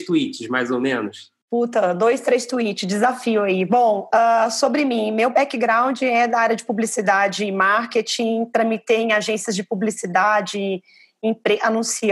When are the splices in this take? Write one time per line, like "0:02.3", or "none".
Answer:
none